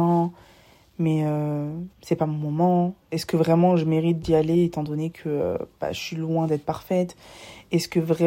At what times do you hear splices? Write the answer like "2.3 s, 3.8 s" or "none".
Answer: 1.9 s, 3.0 s